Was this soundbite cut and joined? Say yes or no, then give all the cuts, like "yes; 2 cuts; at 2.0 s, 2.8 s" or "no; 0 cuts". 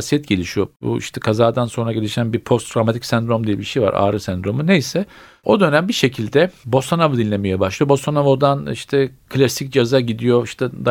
no; 0 cuts